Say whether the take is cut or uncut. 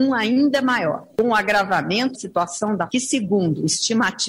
cut